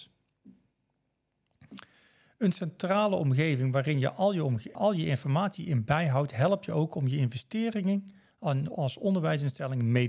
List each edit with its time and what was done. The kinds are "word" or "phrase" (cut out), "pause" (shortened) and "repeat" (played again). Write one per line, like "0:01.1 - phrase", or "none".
0:04.7 - word